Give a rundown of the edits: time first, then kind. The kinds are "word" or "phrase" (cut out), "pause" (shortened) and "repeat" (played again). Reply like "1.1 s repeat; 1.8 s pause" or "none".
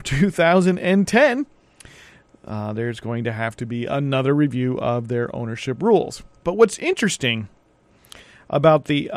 none